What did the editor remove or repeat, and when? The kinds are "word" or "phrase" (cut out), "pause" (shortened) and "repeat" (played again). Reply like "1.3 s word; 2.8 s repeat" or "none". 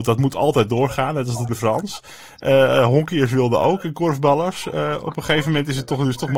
1.5 s word